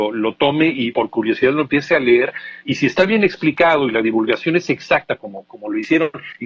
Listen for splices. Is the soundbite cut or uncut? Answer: uncut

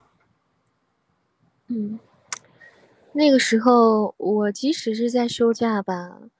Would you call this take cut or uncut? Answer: uncut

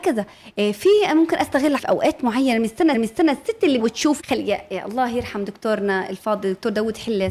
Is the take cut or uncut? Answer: cut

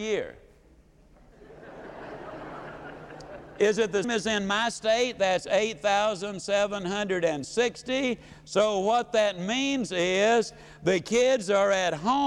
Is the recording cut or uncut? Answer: cut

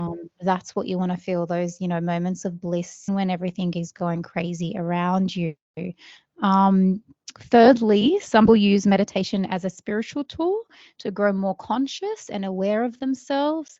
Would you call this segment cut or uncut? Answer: cut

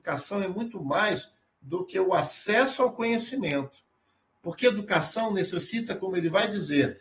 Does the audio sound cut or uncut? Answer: uncut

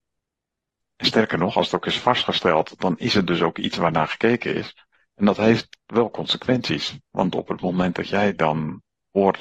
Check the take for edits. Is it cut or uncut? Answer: uncut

